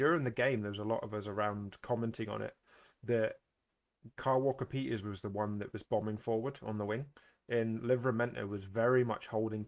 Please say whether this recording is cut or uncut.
uncut